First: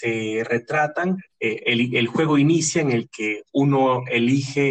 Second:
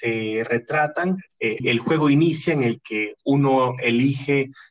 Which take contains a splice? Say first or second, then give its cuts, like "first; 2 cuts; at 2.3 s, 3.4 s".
second; 1 cut; at 1.6 s